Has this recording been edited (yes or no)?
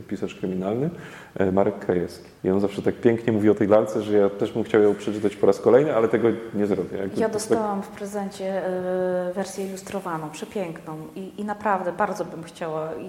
yes